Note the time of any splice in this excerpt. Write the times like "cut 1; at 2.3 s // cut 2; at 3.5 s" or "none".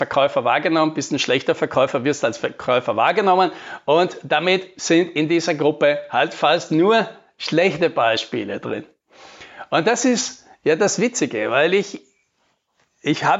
none

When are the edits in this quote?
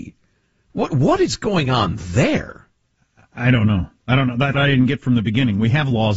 cut 1; at 4.5 s

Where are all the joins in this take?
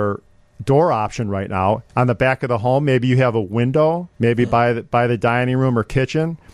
cut 1; at 1.9 s // cut 2; at 4.1 s

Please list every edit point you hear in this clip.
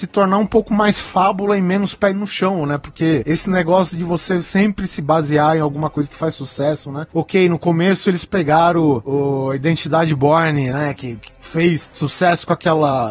none

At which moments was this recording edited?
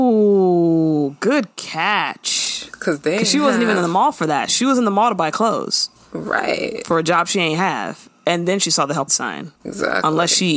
cut 1; at 9.1 s // cut 2; at 9.6 s

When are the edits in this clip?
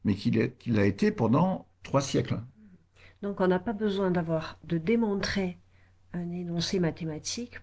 none

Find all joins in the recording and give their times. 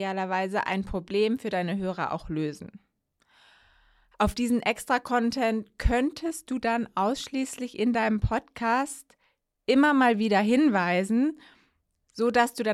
none

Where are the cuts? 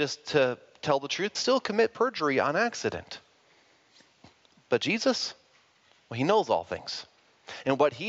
cut 1; at 1.3 s

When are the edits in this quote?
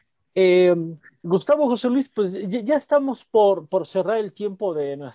none

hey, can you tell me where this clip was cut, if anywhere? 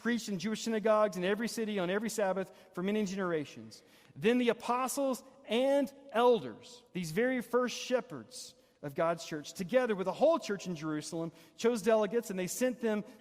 cut 1; at 6.9 s

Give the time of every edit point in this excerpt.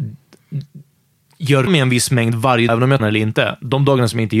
cut 1; at 1.7 s // cut 2; at 2.7 s // cut 3; at 3.0 s

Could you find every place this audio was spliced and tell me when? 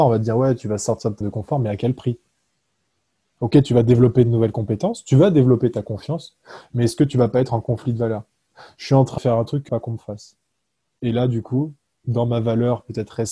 cut 1; at 1.2 s // cut 2; at 9.2 s // cut 3; at 9.7 s

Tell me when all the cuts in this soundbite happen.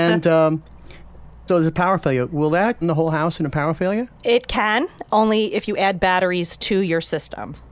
cut 1; at 1.5 s // cut 2; at 2.8 s // cut 3; at 4.1 s

